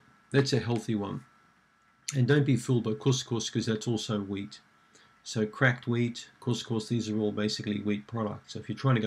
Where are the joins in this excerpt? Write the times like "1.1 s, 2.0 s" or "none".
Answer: none